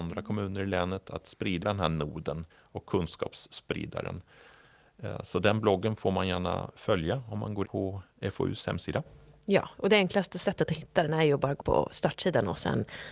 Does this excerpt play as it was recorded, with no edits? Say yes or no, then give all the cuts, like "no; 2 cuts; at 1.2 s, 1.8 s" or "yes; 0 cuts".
no; 4 cuts; at 1.6 s, 2.5 s, 7.6 s, 11.6 s